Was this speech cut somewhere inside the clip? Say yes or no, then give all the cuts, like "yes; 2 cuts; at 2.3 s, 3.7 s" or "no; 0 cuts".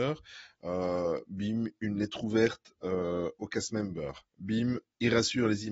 no; 0 cuts